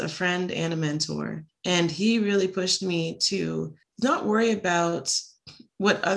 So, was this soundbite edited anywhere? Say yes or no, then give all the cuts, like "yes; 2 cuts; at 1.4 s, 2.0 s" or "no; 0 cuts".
yes; 2 cuts; at 1.5 s, 3.8 s